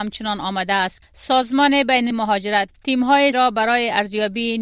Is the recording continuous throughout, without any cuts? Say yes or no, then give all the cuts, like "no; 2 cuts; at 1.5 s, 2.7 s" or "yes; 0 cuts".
no; 4 cuts; at 1.0 s, 2.1 s, 2.7 s, 3.3 s